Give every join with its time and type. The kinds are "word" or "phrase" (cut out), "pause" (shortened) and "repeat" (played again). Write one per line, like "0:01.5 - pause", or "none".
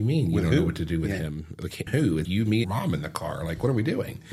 0:01.9 - word
0:02.2 - word
0:02.6 - phrase